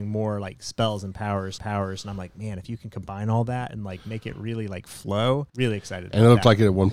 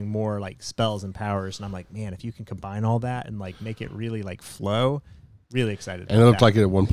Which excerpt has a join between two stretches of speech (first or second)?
first